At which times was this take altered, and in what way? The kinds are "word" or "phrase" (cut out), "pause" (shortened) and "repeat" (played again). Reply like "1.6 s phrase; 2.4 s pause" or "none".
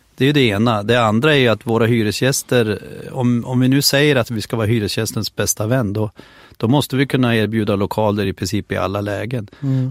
none

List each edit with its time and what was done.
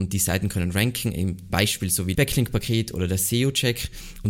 1.5 s word; 2.2 s word

